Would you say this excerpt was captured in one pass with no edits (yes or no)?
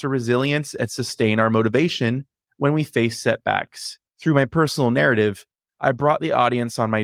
yes